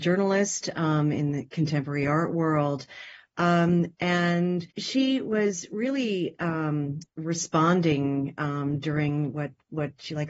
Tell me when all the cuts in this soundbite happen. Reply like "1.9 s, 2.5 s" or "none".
4.7 s